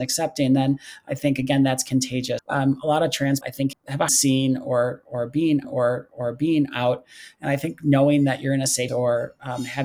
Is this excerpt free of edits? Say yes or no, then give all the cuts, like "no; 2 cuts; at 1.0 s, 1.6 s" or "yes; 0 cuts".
no; 6 cuts; at 2.4 s, 3.4 s, 3.7 s, 4.1 s, 5.6 s, 8.9 s